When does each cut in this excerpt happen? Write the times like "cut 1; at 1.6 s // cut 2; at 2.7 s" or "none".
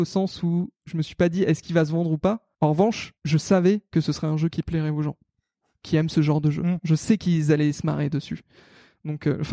cut 1; at 2.5 s // cut 2; at 3.2 s